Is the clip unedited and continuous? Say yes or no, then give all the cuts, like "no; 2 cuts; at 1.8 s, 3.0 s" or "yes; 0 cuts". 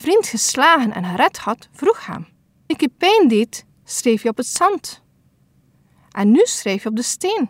no; 1 cut; at 2.7 s